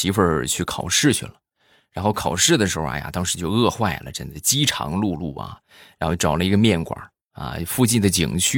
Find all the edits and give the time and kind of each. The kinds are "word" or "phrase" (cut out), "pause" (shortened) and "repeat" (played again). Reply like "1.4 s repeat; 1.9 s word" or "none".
none